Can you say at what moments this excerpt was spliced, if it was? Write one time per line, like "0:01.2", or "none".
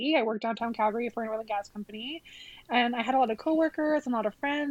none